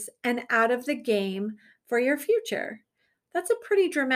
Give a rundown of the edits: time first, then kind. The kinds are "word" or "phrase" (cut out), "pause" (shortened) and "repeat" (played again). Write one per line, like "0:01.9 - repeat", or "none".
none